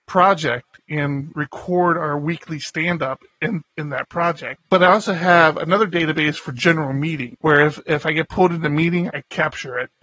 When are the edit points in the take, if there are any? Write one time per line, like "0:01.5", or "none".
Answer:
0:09.1